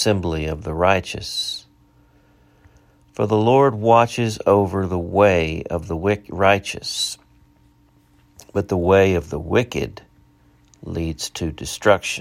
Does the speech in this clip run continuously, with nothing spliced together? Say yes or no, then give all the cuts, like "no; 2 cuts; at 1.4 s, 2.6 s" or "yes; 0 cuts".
yes; 0 cuts